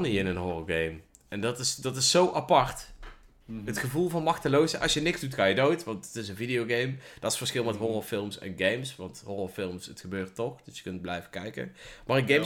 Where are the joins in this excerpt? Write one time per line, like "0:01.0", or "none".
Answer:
none